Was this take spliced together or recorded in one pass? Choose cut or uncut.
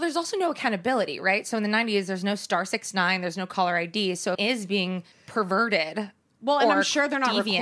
cut